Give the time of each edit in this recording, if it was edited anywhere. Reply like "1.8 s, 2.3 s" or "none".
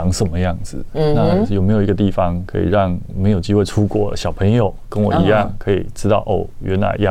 none